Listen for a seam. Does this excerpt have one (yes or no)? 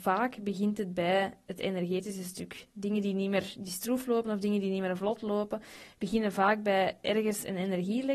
no